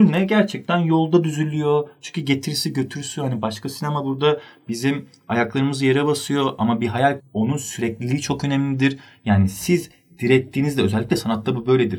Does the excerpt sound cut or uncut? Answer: cut